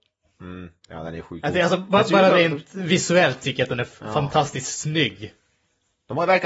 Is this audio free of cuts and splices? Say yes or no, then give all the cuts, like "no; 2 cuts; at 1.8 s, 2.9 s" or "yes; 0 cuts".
yes; 0 cuts